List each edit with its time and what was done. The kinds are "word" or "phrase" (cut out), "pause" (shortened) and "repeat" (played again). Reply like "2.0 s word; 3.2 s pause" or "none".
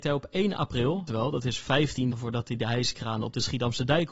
1.1 s word; 2.1 s word